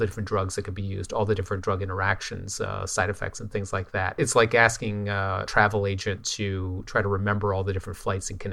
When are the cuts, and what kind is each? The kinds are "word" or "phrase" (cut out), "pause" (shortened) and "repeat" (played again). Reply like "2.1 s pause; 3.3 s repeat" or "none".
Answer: none